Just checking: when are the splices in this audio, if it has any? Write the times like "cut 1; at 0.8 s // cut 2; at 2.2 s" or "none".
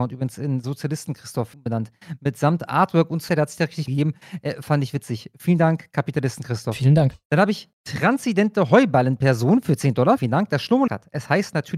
cut 1; at 1.5 s // cut 2; at 3.3 s // cut 3; at 3.9 s // cut 4; at 7.7 s // cut 5; at 10.2 s // cut 6; at 10.9 s